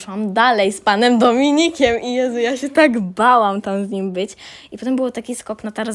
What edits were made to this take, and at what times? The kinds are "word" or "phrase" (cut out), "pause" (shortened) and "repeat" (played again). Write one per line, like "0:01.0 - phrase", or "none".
none